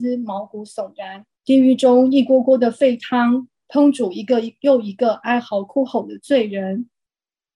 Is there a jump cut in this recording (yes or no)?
yes